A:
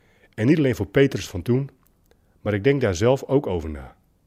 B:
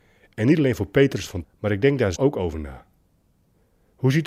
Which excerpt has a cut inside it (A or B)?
B